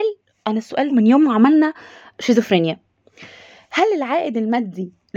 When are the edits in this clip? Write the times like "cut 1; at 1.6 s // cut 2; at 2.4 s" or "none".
cut 1; at 0.9 s